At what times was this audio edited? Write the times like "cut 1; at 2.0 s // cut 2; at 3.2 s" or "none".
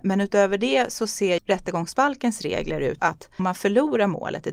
cut 1; at 1.4 s // cut 2; at 3.0 s // cut 3; at 3.4 s